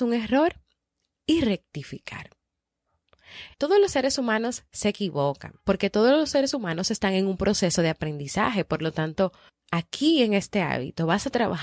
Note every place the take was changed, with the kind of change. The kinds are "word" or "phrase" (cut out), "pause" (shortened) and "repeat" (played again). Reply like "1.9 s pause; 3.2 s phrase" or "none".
3.5 s pause; 5.6 s pause; 9.5 s pause